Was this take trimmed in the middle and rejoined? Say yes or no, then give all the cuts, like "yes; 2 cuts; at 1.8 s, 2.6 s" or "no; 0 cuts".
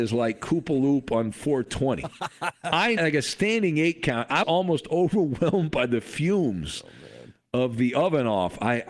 yes; 2 cuts; at 3.0 s, 4.4 s